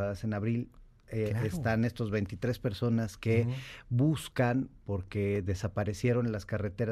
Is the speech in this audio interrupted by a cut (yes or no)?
no